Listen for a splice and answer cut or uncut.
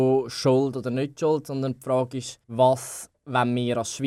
cut